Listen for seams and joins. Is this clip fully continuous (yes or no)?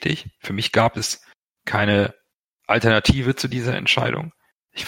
yes